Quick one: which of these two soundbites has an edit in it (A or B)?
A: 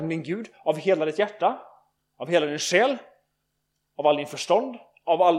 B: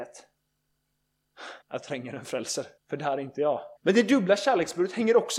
B